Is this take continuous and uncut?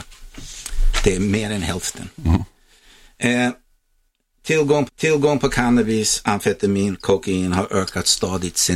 no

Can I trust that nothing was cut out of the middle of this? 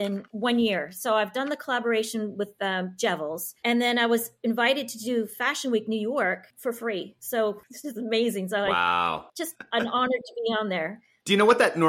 yes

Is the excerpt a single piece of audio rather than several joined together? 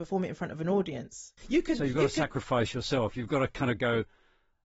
no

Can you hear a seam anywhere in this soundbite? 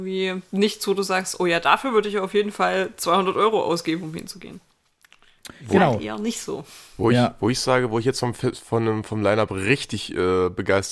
no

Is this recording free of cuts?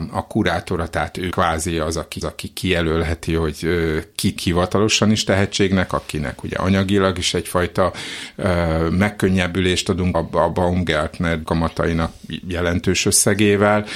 no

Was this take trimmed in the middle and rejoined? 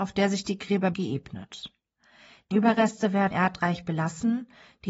yes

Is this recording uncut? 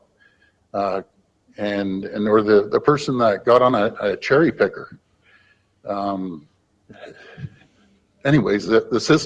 yes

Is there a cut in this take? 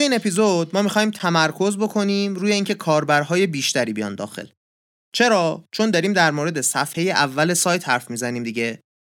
no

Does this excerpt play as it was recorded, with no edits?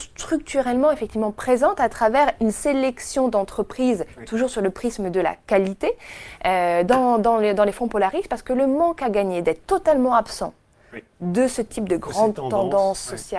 yes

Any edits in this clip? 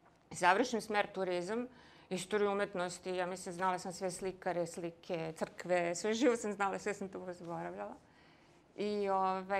no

